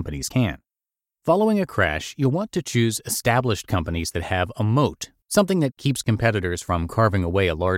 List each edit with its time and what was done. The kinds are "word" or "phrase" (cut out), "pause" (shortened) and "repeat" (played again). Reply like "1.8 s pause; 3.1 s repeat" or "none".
none

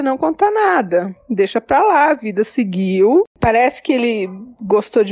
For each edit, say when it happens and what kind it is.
none

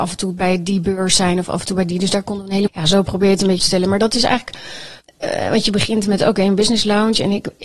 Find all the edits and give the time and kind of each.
2.7 s phrase; 3.6 s word; 5.0 s pause

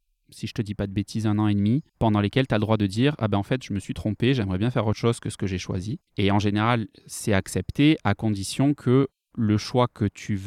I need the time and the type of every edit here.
1.9 s pause; 6.1 s pause

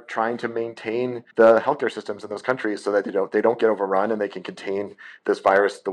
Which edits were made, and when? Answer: 1.3 s pause

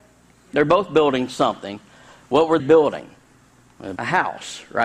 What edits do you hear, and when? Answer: 2.6 s word; 4.0 s word

